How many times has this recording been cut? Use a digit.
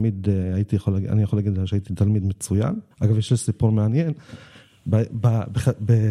1